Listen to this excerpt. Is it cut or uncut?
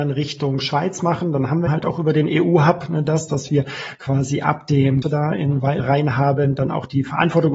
cut